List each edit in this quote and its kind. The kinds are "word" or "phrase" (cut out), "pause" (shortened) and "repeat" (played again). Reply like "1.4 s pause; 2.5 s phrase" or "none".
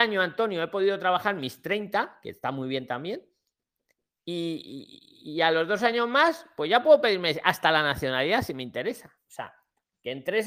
none

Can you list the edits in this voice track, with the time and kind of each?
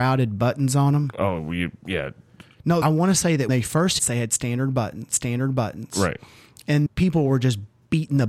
2.8 s phrase; 3.5 s word; 4.0 s phrase; 5.1 s repeat; 6.9 s word

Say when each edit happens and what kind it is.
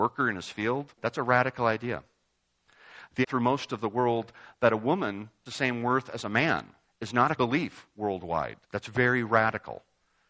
0.9 s pause; 3.2 s word; 5.5 s word; 6.8 s pause; 7.4 s word; 8.6 s pause

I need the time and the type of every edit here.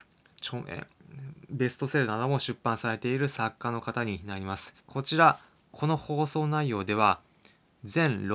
4.8 s pause

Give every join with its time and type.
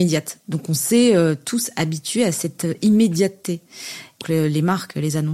4.2 s word

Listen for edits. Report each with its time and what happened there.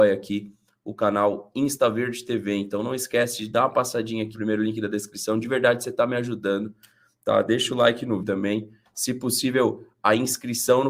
4.3 s word; 8.2 s word

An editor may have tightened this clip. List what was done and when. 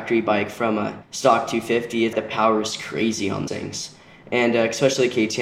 1.0 s pause; 2.1 s word; 3.5 s word

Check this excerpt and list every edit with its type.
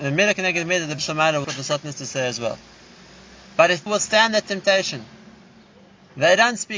1.0 s word; 1.4 s word; 3.9 s word

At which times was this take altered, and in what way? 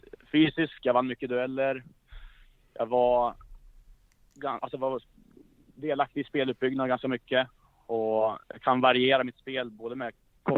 8.4 s pause

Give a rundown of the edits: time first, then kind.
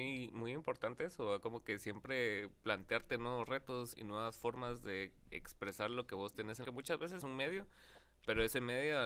3.9 s word; 6.6 s phrase; 7.2 s word

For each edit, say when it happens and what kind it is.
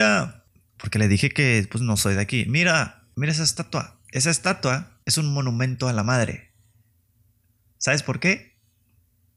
5.0 s pause

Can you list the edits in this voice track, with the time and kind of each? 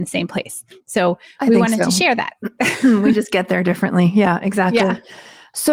none

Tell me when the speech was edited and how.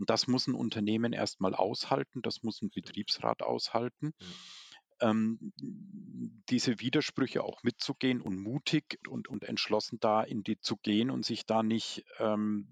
9.0 s word; 10.6 s word

